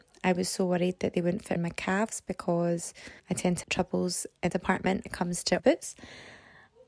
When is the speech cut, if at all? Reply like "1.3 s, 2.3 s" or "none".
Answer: 1.6 s, 3.2 s, 3.6 s, 4.5 s, 5.1 s, 5.6 s